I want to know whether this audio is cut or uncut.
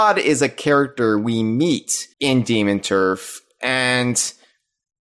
cut